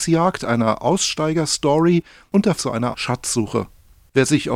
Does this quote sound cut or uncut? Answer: cut